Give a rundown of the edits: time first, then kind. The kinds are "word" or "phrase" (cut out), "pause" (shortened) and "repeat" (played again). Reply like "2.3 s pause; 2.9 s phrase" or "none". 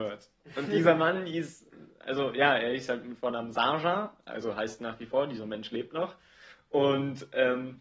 none